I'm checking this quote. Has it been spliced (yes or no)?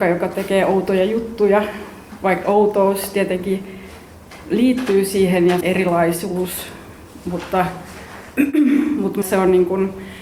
yes